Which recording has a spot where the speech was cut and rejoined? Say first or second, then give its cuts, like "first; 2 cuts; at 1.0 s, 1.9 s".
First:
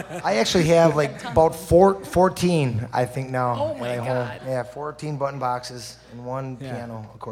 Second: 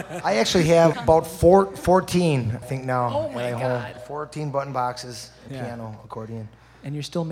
second; 4 cuts; at 0.9 s, 2.6 s, 4.0 s, 5.5 s